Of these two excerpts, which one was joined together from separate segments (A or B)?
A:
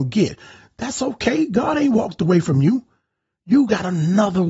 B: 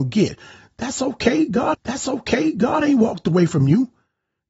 B